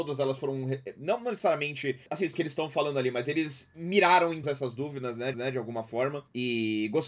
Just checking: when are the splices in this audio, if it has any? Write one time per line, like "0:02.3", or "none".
0:02.3
0:04.4
0:05.3